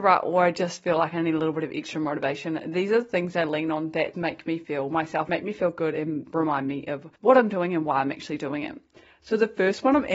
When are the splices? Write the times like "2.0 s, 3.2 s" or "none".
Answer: 4.1 s, 5.3 s, 7.2 s